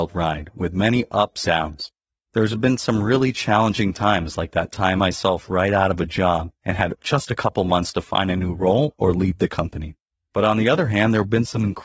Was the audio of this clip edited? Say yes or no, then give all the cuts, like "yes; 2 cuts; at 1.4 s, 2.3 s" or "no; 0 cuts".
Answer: yes; 3 cuts; at 1.4 s, 5.0 s, 6.5 s